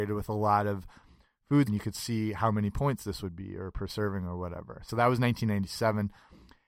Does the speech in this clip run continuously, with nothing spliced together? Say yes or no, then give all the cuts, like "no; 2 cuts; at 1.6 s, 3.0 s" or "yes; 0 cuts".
no; 1 cut; at 1.7 s